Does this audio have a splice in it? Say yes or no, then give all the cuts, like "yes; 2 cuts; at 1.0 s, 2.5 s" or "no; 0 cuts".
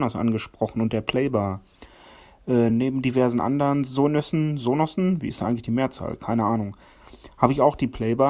no; 0 cuts